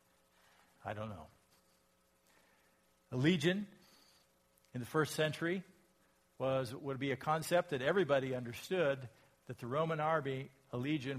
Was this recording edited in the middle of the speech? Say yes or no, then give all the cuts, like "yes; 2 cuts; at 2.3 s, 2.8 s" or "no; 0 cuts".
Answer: no; 0 cuts